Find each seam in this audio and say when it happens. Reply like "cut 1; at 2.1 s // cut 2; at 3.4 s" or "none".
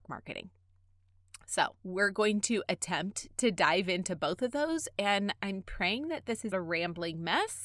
cut 1; at 1.8 s // cut 2; at 6.5 s